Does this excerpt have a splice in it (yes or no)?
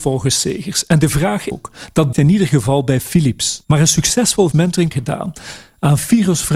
yes